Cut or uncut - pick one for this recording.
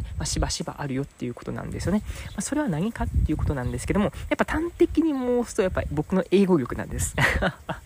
uncut